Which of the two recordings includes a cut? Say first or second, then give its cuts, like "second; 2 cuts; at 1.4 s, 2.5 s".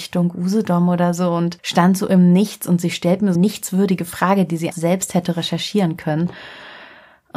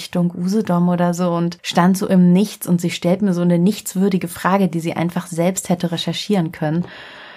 first; 2 cuts; at 3.4 s, 4.7 s